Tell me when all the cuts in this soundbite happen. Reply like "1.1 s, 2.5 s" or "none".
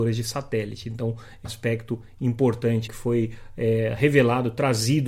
1.4 s, 2.9 s

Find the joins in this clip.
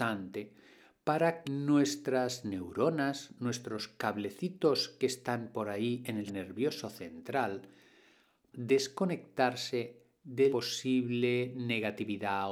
1.4 s, 6.3 s, 8.5 s, 10.5 s

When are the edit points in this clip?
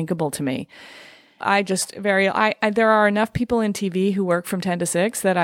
none

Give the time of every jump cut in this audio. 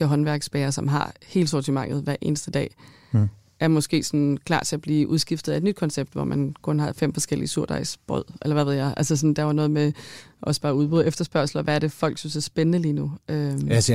none

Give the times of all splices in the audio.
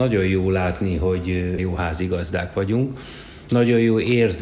1.6 s, 3.5 s

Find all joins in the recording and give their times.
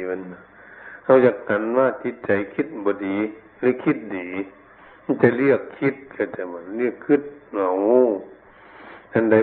none

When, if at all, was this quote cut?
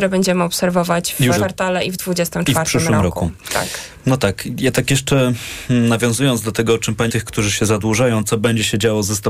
1.4 s, 7.1 s

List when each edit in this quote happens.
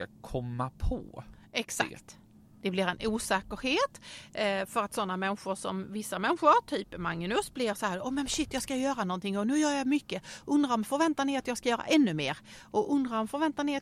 none

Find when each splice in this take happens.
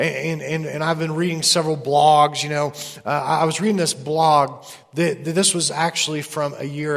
none

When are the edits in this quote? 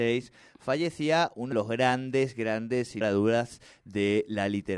1.5 s, 3.0 s

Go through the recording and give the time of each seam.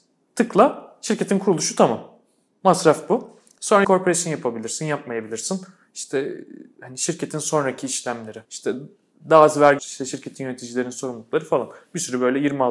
3.8 s, 8.4 s, 9.8 s

